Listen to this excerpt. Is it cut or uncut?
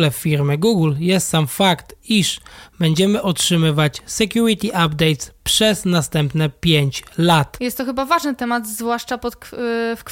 uncut